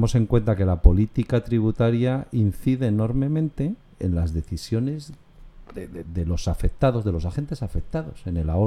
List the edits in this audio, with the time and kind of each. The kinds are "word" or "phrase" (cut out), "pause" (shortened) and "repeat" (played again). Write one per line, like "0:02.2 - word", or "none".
0:06.0 - word